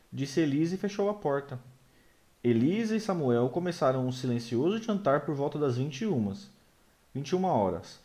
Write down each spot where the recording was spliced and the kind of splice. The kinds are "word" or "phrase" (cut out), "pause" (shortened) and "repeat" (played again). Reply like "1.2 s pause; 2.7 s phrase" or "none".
none